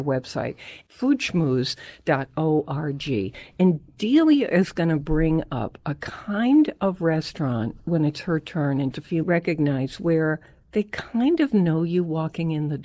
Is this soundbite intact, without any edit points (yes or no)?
no